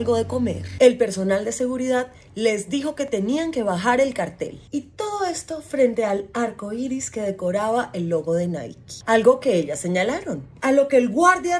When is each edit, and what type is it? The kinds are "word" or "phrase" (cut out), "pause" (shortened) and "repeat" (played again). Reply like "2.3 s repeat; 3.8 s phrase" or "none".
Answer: none